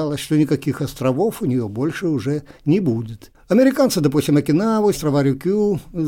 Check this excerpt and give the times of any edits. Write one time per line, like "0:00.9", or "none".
0:04.9